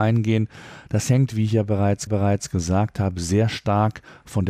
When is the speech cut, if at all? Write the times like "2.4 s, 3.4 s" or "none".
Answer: 2.1 s